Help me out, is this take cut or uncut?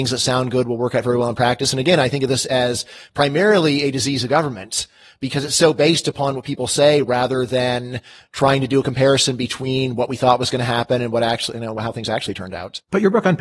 uncut